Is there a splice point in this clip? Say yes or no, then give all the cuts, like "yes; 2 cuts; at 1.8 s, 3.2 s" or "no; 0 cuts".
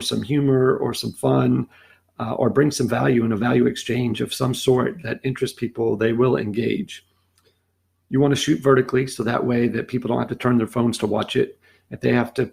no; 0 cuts